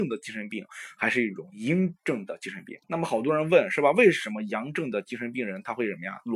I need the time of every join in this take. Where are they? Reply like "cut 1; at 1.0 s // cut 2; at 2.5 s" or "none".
cut 1; at 2.8 s